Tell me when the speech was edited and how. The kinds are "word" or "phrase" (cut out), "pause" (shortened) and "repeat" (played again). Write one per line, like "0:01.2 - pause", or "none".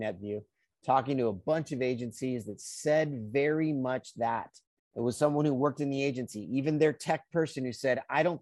0:04.8 - pause